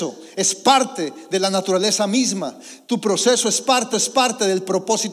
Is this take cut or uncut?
cut